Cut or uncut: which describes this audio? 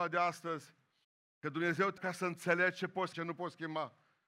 cut